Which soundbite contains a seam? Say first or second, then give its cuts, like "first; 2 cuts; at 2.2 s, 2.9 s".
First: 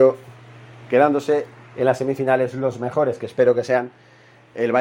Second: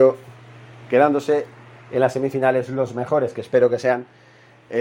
first; 1 cut; at 1.6 s